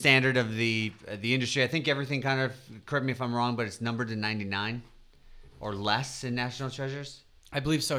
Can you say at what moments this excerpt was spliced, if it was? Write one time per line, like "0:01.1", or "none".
none